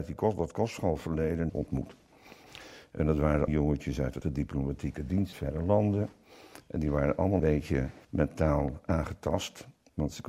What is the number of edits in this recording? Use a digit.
6